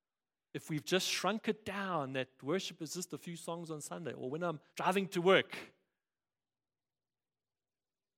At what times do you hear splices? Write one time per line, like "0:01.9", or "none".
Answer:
0:04.7

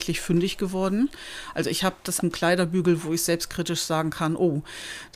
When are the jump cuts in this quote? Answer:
0:02.2

